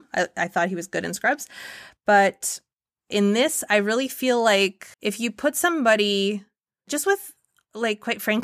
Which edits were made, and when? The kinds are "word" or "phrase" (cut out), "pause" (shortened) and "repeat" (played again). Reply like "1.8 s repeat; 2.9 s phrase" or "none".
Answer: 4.9 s pause

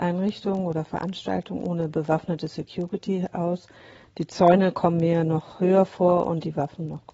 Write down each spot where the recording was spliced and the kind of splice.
none

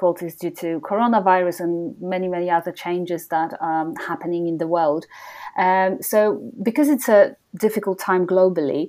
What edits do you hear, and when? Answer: none

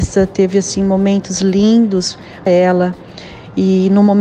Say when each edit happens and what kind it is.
2.5 s phrase

